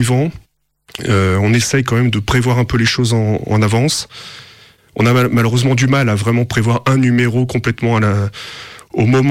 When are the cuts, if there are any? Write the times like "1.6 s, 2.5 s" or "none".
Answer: none